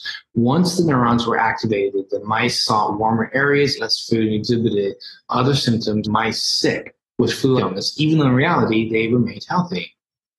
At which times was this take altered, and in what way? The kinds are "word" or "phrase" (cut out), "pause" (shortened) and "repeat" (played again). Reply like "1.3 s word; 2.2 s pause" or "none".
3.8 s word; 6.0 s word; 7.6 s word